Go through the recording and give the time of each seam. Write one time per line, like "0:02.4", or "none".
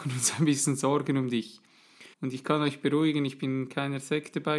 0:02.1